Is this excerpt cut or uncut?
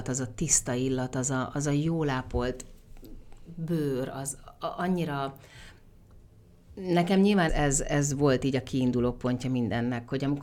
cut